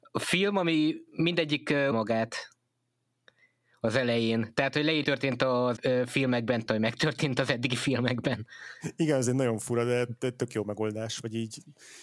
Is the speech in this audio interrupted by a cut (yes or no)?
yes